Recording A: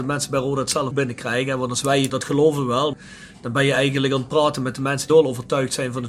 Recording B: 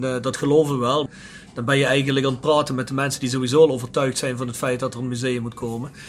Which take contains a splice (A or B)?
A